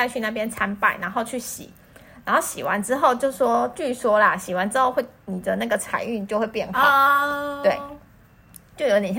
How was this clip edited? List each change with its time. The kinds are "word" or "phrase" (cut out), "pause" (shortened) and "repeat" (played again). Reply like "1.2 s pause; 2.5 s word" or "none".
none

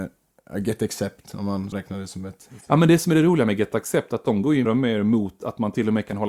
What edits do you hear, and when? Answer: 1.7 s word; 4.6 s word

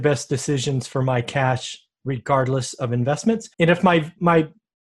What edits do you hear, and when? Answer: 3.5 s pause

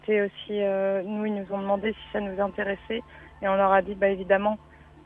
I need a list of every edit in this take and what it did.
none

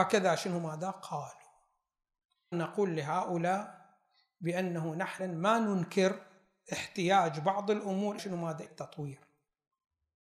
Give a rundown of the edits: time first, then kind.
2.5 s word; 5.2 s word; 8.2 s word; 8.6 s word

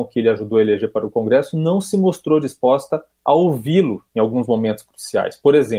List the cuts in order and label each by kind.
3.1 s pause

